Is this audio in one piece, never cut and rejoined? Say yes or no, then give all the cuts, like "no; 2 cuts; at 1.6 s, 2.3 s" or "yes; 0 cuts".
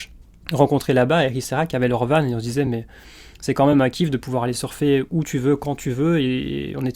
yes; 0 cuts